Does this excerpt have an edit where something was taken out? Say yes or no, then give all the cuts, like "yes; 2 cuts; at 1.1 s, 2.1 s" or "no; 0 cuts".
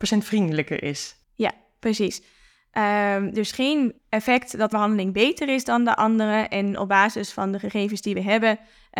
yes; 3 cuts; at 1.2 s, 4.0 s, 4.7 s